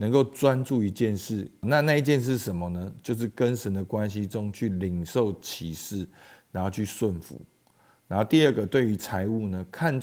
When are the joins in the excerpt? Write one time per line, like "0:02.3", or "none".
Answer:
0:01.6